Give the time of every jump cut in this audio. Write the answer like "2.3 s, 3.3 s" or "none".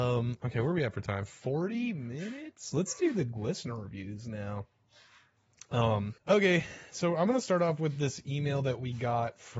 6.2 s